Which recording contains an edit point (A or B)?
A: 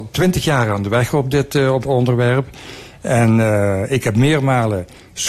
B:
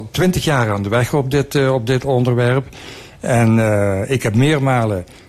A